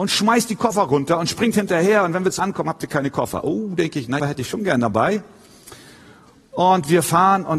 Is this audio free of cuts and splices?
no; 2 cuts; at 2.4 s, 4.2 s

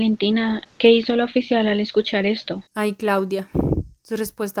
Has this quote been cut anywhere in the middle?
no; 0 cuts

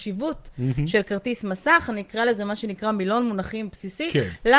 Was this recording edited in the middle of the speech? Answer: no; 0 cuts

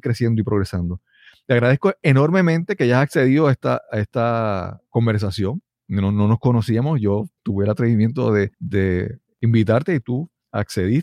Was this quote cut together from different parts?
yes; 2 cuts; at 7.4 s, 8.5 s

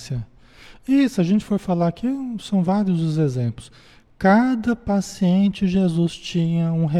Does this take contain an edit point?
no; 0 cuts

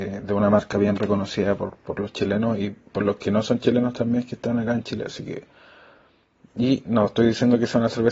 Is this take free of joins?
yes; 0 cuts

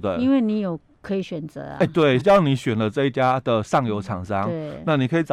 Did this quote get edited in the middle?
yes; 1 cut; at 2.2 s

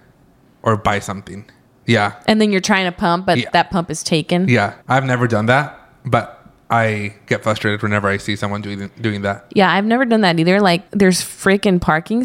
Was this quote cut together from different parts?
yes; 3 cuts; at 1.7 s, 4.8 s, 10.9 s

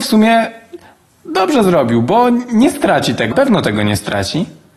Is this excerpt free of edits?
no; 1 cut; at 3.3 s

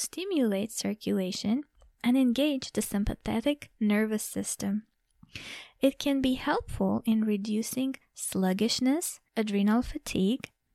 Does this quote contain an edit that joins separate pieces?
yes; 1 cut; at 9.3 s

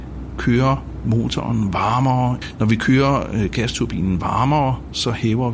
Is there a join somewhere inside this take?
no; 0 cuts

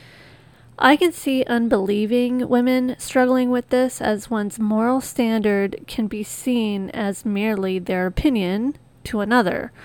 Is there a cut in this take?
no; 0 cuts

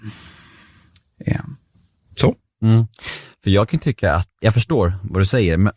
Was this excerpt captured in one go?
no; 1 cut; at 4.4 s

